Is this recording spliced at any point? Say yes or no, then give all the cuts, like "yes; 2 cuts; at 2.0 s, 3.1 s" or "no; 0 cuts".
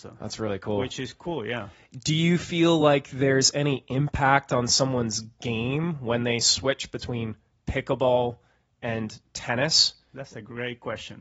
no; 0 cuts